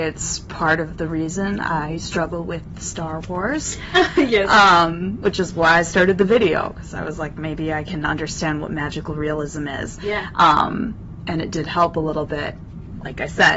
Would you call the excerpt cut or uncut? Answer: uncut